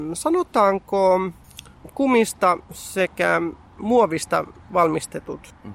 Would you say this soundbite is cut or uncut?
cut